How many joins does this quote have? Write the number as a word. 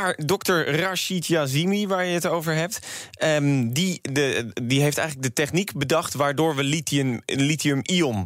zero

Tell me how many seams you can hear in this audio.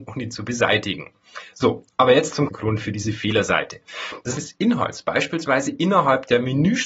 two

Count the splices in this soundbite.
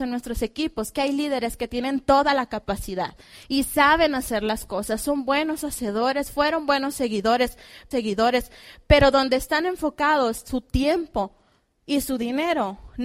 one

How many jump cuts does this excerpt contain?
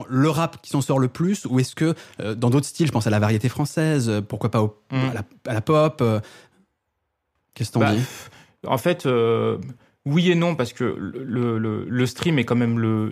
zero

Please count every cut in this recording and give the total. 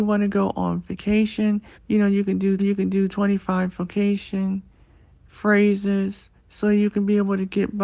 three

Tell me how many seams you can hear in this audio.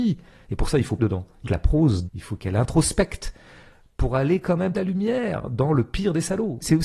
four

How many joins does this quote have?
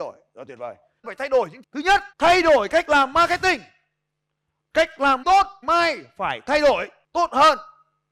five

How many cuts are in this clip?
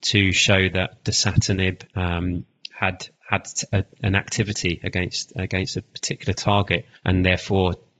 three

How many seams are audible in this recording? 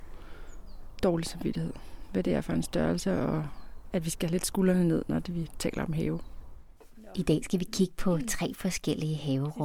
zero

